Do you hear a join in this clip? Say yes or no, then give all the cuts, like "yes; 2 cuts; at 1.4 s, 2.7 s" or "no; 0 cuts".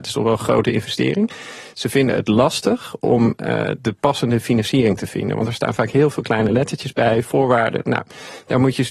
no; 0 cuts